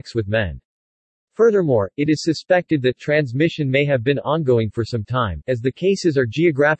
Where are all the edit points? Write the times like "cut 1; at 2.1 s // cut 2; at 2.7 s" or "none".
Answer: none